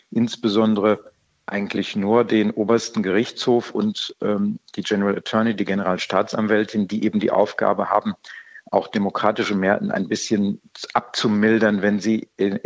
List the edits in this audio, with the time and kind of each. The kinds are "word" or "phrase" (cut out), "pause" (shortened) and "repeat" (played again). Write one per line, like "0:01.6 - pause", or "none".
none